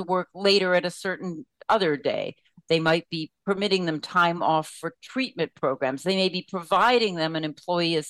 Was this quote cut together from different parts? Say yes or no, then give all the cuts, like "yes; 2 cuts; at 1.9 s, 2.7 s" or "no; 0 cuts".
no; 0 cuts